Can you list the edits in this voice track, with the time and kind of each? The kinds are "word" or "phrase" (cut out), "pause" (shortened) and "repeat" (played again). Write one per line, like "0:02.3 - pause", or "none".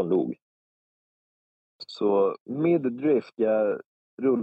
0:02.4 - pause
0:03.3 - word